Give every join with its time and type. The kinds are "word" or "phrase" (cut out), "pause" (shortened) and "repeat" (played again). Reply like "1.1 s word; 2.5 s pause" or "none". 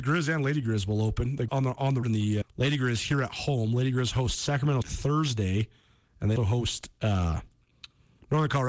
1.5 s word; 2.0 s word; 2.4 s word; 4.8 s word; 6.4 s word